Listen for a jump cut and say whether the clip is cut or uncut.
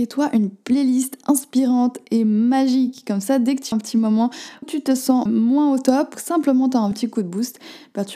cut